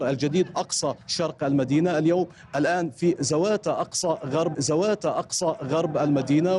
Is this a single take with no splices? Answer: no; 2 cuts; at 1.0 s, 4.5 s

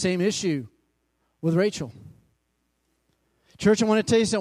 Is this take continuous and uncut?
yes; 0 cuts

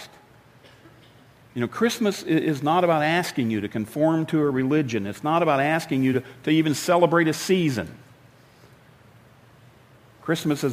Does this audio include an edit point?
no; 0 cuts

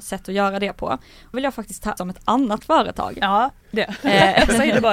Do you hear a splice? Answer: yes; 3 cuts; at 1.3 s, 2.0 s, 3.7 s

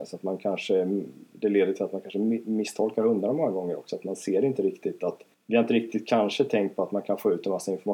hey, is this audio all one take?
no; 1 cut; at 5.3 s

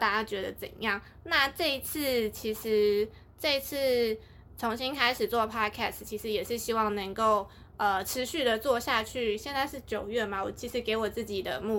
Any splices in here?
no; 0 cuts

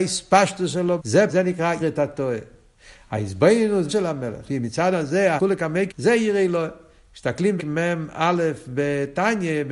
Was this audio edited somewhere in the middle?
yes; 9 cuts; at 1.0 s, 1.3 s, 1.8 s, 3.9 s, 4.5 s, 4.9 s, 5.4 s, 5.9 s, 7.6 s

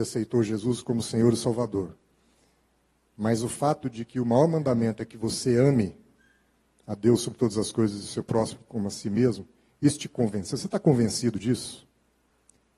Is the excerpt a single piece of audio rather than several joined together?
yes; 0 cuts

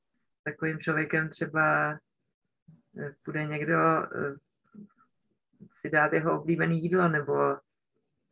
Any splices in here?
no; 0 cuts

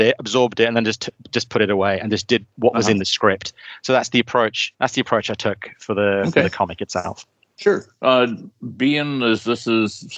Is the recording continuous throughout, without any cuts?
yes; 0 cuts

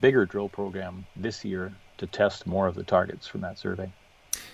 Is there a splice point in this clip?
no; 0 cuts

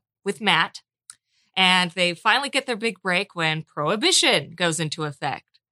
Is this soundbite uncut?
yes; 0 cuts

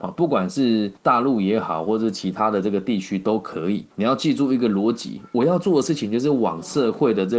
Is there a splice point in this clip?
yes; 2 cuts; at 1.0 s, 3.9 s

